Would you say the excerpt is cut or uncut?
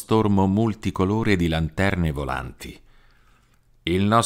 uncut